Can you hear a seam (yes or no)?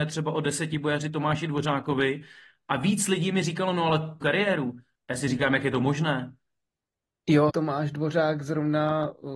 yes